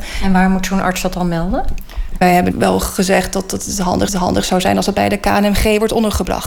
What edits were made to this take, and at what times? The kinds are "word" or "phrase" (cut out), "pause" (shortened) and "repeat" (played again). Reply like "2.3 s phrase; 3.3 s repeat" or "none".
4.1 s repeat